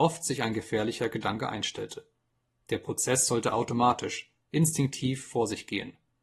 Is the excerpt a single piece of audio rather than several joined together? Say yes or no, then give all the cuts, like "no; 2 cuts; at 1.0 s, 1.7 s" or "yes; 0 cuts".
yes; 0 cuts